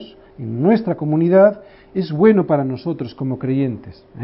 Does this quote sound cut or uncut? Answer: uncut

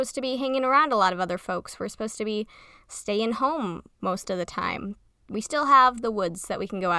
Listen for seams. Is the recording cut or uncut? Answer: uncut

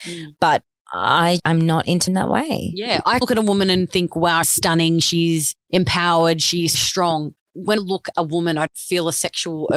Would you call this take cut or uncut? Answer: cut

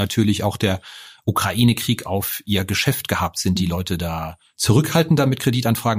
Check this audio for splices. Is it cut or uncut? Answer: uncut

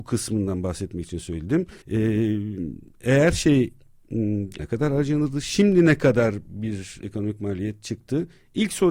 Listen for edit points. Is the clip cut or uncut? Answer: cut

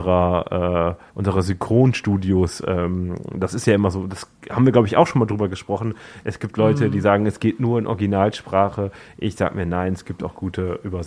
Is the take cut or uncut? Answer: cut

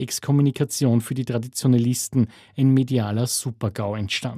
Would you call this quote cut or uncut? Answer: uncut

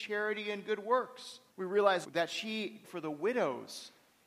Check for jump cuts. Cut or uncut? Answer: cut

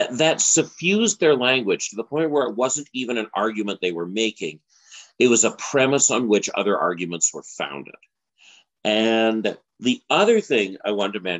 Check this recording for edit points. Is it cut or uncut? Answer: uncut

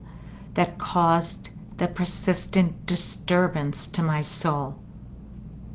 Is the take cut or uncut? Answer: uncut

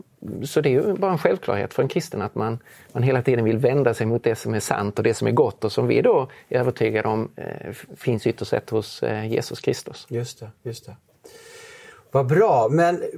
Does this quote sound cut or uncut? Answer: uncut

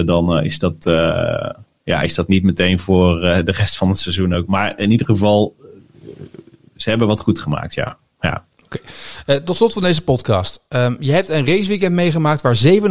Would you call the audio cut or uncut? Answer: uncut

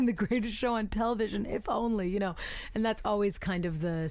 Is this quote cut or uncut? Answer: uncut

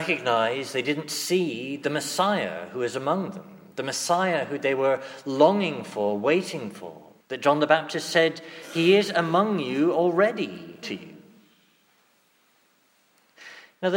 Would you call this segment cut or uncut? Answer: cut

